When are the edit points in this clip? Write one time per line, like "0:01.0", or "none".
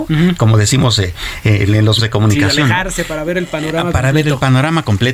0:02.0